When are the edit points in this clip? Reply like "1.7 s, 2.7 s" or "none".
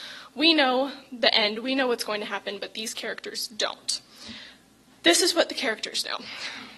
none